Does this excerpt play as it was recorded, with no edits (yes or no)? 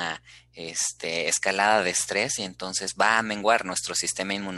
yes